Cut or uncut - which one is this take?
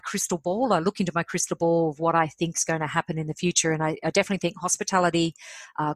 uncut